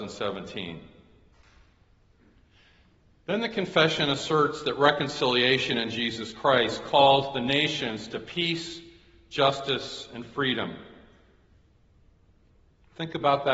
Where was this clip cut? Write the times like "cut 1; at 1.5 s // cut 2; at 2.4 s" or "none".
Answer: none